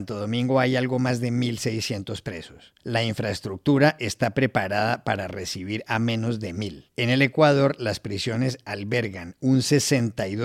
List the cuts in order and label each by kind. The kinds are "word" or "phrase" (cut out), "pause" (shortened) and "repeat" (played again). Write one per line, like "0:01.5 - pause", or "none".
0:02.8 - pause
0:06.9 - pause